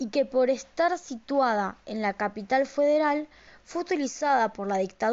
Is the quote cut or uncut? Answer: uncut